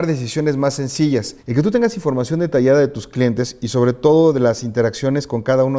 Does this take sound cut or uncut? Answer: cut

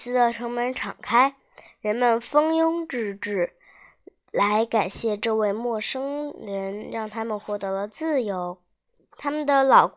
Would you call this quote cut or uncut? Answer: cut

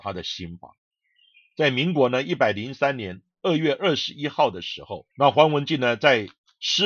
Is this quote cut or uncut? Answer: cut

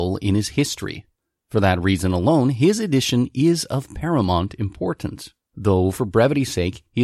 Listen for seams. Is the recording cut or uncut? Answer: uncut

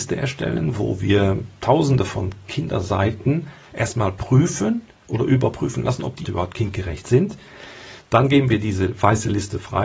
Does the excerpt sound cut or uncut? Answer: cut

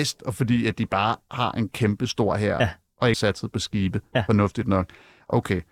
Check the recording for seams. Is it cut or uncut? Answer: cut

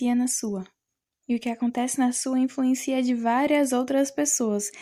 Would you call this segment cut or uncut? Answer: uncut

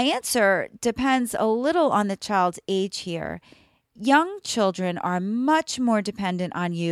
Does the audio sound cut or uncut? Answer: uncut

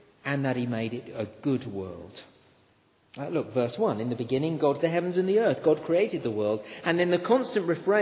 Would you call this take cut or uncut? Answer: cut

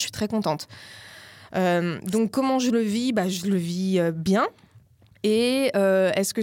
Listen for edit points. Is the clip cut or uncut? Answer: uncut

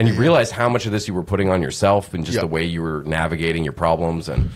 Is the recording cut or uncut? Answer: uncut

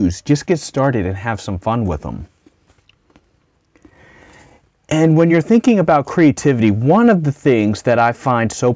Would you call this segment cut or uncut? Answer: uncut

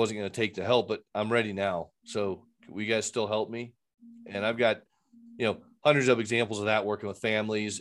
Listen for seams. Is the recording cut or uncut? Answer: uncut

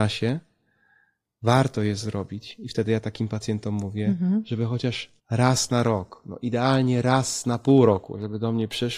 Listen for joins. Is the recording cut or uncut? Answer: cut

